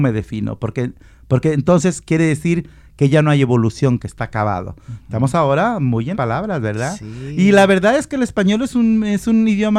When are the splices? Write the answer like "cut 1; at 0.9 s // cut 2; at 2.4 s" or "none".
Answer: cut 1; at 6.1 s

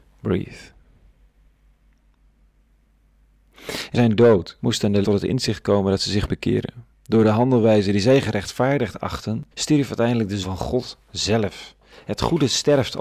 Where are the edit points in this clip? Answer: cut 1; at 3.9 s // cut 2; at 4.6 s // cut 3; at 5.0 s // cut 4; at 6.3 s // cut 5; at 6.9 s // cut 6; at 9.5 s // cut 7; at 10.4 s

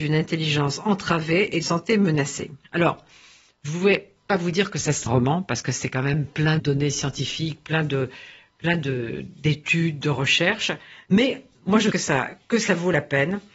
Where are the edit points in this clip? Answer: cut 1; at 1.6 s // cut 2; at 2.6 s // cut 3; at 5.1 s // cut 4; at 6.6 s // cut 5; at 11.9 s

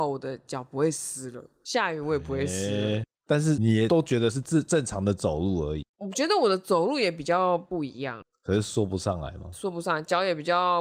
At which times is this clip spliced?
cut 1; at 5.9 s

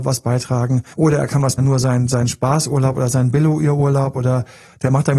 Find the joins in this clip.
cut 1; at 0.9 s // cut 2; at 1.6 s

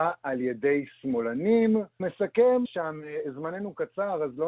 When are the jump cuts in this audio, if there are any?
cut 1; at 2.0 s // cut 2; at 2.6 s

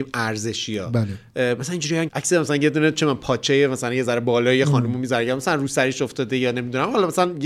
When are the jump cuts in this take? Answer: cut 1; at 2.1 s

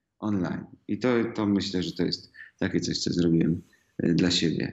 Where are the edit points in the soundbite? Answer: none

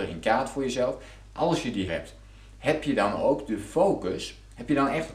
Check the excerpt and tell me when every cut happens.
cut 1; at 1.9 s

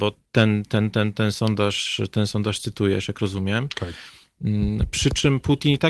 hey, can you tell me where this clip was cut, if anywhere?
none

